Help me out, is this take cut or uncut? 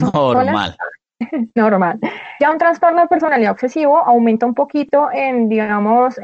uncut